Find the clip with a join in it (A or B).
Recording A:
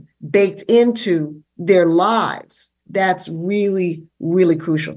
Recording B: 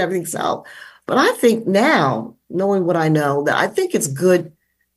A